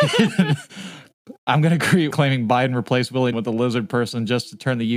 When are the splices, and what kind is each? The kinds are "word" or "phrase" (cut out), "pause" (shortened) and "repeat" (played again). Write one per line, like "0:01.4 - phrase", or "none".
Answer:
0:02.1 - word
0:03.3 - word